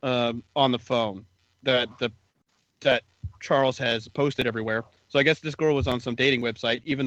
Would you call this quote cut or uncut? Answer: cut